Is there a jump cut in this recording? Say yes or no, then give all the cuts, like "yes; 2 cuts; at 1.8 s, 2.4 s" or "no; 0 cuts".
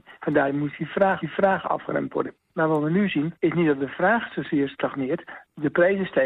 yes; 1 cut; at 1.2 s